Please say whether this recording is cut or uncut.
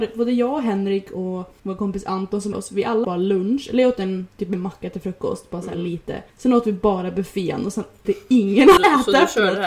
cut